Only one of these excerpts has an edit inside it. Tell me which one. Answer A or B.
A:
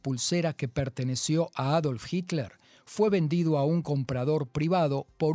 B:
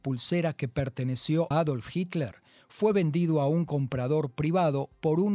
B